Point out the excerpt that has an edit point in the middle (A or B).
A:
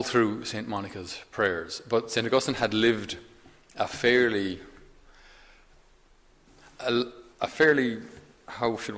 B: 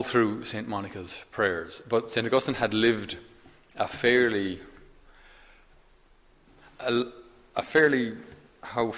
A